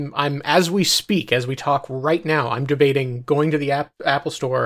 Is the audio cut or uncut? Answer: uncut